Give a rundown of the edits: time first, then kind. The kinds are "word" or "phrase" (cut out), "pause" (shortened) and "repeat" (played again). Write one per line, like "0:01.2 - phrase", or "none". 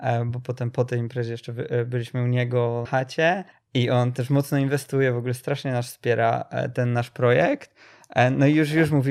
0:02.8 - word
0:03.5 - pause
0:06.7 - word